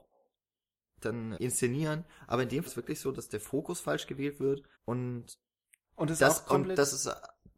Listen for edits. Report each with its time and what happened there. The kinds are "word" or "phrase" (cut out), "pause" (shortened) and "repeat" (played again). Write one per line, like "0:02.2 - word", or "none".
0:01.3 - word
0:02.7 - word
0:04.7 - pause